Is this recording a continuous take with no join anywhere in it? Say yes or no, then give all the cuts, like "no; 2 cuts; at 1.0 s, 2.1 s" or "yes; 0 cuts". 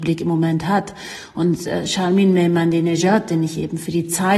yes; 0 cuts